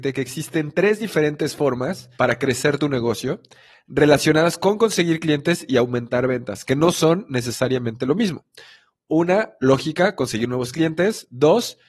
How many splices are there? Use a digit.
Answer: 1